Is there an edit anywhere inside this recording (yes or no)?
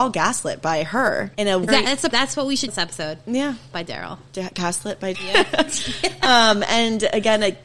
yes